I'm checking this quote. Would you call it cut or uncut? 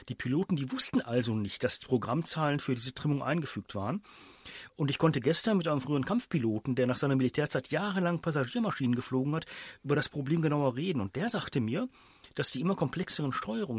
uncut